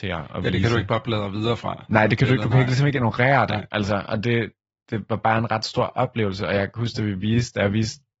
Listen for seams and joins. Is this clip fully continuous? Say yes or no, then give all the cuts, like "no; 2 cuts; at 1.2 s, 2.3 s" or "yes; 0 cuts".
yes; 0 cuts